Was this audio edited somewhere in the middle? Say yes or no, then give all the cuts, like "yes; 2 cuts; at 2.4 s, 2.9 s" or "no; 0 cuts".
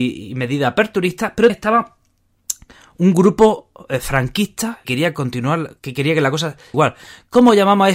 yes; 4 cuts; at 1.5 s, 4.8 s, 5.8 s, 6.7 s